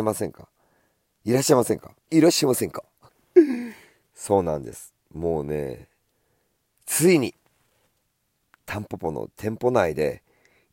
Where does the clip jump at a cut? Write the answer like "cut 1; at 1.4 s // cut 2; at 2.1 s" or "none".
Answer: cut 1; at 2.0 s // cut 2; at 3.1 s

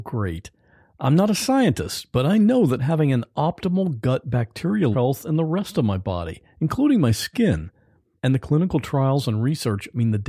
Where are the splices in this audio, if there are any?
cut 1; at 4.9 s

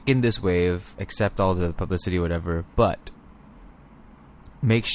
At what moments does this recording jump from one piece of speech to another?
none

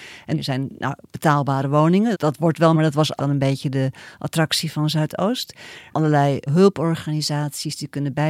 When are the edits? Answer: cut 1; at 2.1 s // cut 2; at 2.7 s // cut 3; at 3.2 s // cut 4; at 5.9 s // cut 5; at 6.5 s

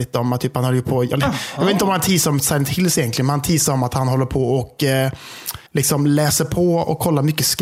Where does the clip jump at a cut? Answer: cut 1; at 5.7 s

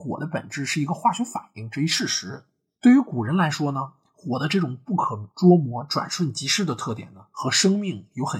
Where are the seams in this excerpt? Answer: cut 1; at 5.3 s

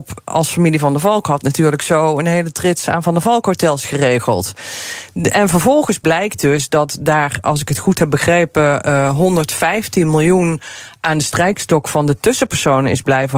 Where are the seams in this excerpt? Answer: none

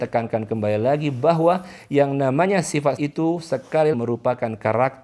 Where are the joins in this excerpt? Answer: cut 1; at 3.0 s // cut 2; at 3.9 s

